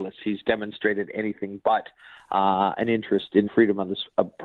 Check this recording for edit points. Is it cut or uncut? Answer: cut